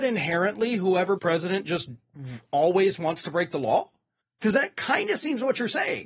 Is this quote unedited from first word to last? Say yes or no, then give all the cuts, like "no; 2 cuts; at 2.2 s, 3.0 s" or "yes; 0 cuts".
no; 2 cuts; at 1.2 s, 4.2 s